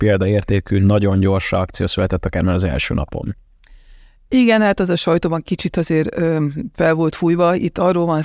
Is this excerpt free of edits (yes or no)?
yes